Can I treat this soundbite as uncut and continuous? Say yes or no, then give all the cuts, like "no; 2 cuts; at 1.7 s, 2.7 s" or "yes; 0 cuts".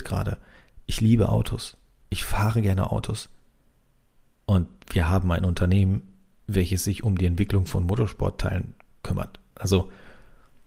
yes; 0 cuts